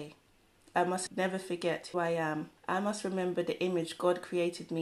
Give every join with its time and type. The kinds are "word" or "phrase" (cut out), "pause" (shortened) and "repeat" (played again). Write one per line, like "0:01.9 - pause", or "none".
0:01.1 - word
0:01.9 - word
0:02.6 - pause